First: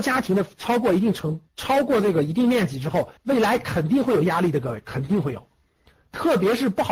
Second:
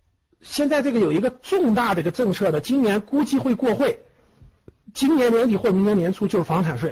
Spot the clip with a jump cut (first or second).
first